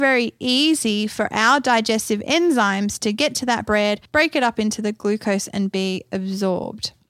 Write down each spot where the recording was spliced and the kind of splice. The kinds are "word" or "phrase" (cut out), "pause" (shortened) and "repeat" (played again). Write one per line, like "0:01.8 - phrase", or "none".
0:04.1 - pause